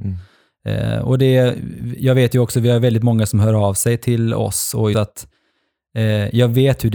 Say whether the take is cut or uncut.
cut